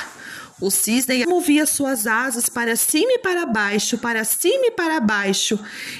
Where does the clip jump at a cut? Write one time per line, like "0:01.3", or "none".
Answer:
0:01.2